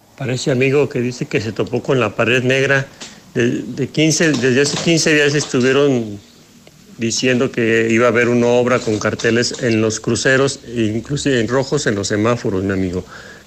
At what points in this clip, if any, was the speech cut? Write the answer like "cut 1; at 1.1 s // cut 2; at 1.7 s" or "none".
cut 1; at 11.5 s